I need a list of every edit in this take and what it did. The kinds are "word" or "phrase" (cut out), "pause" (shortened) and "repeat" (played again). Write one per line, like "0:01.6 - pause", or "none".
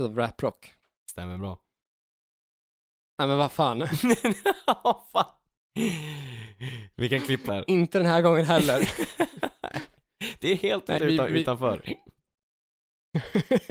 0:07.5 - word
0:11.0 - word

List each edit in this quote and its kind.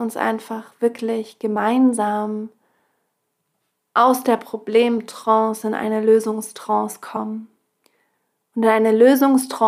none

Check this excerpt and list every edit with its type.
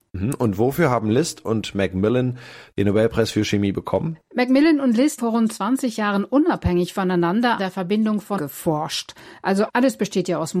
0:05.2 - word
0:07.6 - word
0:08.4 - word

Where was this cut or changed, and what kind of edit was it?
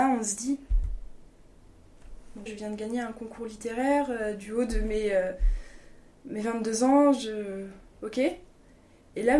0:02.5 - phrase
0:07.9 - pause

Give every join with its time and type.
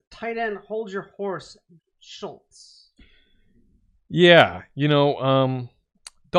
0:01.8 - word

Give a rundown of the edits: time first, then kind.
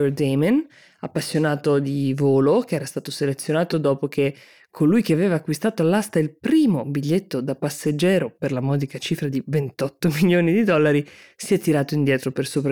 none

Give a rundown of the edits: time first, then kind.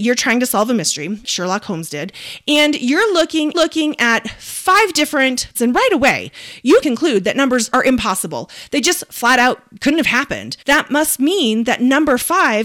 0:01.2 - word
0:03.5 - repeat
0:05.5 - phrase
0:06.8 - word
0:07.7 - phrase
0:10.6 - pause

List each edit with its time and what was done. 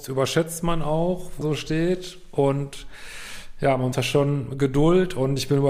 0:01.4 - word
0:03.9 - word

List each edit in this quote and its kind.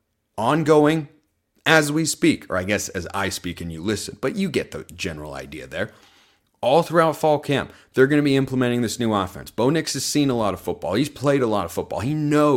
none

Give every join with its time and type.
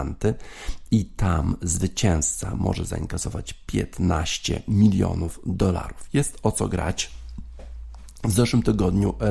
none

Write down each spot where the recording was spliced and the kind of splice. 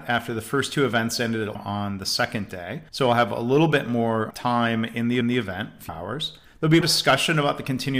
0:01.5 - word
0:02.9 - pause
0:04.3 - word
0:05.2 - repeat
0:05.9 - word
0:06.4 - pause
0:06.8 - word

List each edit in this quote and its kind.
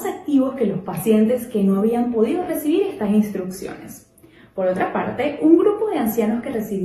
none

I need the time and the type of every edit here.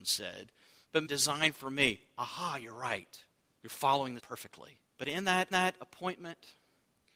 0:01.1 - phrase
0:03.5 - pause
0:04.2 - word
0:04.9 - pause
0:05.5 - repeat

